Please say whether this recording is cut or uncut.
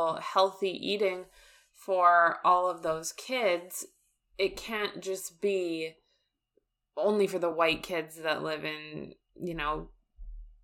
uncut